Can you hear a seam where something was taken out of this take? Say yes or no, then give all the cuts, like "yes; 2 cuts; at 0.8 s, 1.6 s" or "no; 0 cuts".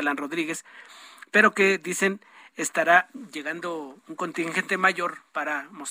no; 0 cuts